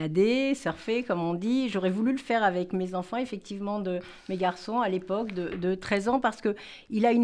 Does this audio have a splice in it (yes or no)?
no